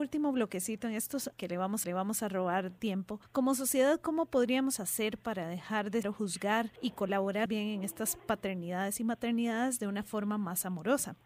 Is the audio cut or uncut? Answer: cut